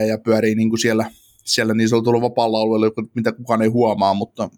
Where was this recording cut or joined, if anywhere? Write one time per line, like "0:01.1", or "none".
none